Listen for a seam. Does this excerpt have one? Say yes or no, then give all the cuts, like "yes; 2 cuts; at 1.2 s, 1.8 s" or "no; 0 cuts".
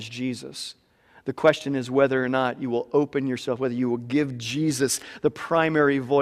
no; 0 cuts